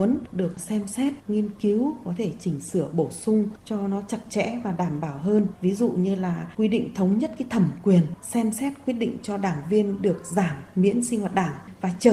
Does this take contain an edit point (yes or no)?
no